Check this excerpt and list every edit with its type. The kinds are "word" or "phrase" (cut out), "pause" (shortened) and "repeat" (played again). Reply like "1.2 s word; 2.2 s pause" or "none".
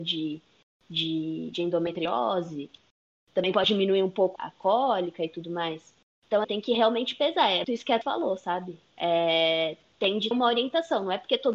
4.4 s word; 6.4 s word; 7.6 s word; 8.0 s word; 10.3 s word